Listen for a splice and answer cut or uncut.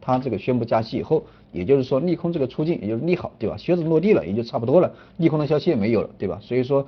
uncut